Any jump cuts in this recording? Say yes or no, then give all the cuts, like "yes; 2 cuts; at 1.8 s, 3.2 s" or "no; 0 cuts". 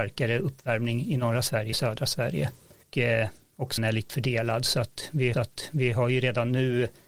yes; 5 cuts; at 1.7 s, 2.8 s, 3.8 s, 4.1 s, 5.3 s